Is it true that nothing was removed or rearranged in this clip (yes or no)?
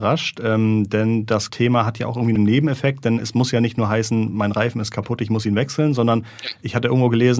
no